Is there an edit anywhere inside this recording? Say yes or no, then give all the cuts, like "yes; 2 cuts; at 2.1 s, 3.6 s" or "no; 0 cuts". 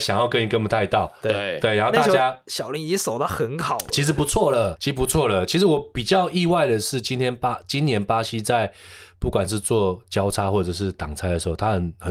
yes; 1 cut; at 4.8 s